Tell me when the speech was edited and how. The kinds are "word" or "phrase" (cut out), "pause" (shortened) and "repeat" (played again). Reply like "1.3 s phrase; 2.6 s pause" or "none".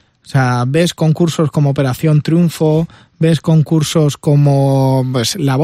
none